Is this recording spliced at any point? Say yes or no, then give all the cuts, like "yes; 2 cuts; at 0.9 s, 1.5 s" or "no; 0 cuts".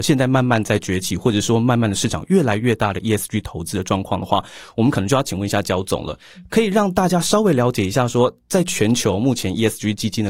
no; 0 cuts